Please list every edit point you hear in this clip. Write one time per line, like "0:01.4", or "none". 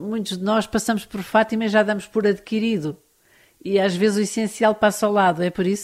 none